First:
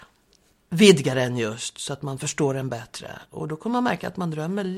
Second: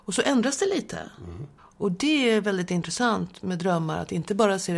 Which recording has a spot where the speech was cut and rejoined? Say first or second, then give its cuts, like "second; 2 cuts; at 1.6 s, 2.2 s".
second; 1 cut; at 1.6 s